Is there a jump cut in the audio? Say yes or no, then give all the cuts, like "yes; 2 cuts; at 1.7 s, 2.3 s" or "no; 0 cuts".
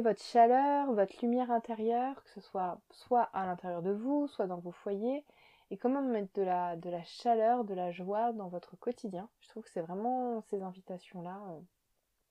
no; 0 cuts